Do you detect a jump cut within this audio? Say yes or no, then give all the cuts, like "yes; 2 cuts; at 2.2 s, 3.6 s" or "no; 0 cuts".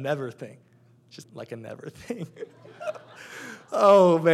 yes; 1 cut; at 1.2 s